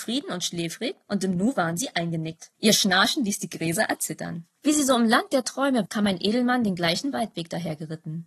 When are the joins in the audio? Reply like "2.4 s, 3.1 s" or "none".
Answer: 2.5 s, 4.6 s, 5.9 s